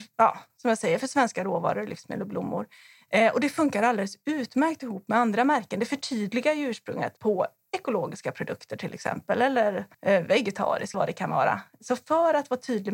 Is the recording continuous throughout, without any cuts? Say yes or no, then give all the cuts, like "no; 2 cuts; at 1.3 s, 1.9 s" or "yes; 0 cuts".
no; 3 cuts; at 7.2 s, 9.9 s, 10.9 s